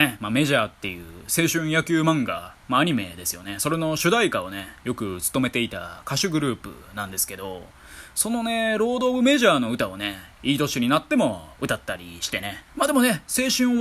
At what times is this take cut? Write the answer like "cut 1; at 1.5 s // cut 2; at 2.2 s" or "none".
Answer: cut 1; at 2.6 s // cut 2; at 12.7 s